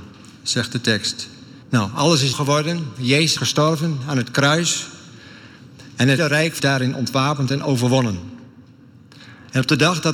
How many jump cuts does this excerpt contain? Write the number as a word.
five